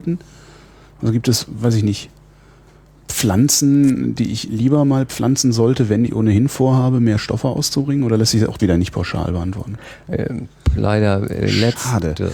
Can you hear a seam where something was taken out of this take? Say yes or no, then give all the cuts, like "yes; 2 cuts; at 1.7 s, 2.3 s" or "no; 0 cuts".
yes; 2 cuts; at 6.1 s, 8.6 s